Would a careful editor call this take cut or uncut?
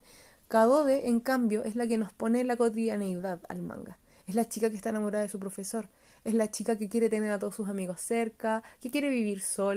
uncut